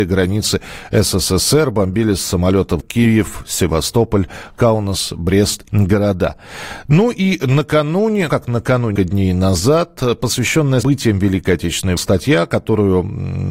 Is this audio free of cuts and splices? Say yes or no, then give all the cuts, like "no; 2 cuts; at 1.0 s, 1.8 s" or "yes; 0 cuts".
no; 6 cuts; at 2.8 s, 5.7 s, 8.3 s, 9.0 s, 10.8 s, 12.0 s